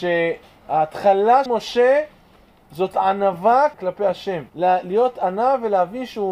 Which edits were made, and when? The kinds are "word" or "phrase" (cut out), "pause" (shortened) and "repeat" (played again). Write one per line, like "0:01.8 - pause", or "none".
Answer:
0:01.5 - word
0:03.7 - word
0:04.5 - pause